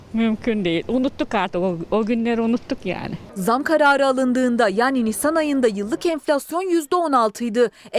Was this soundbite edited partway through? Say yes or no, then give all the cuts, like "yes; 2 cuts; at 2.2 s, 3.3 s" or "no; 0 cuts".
no; 0 cuts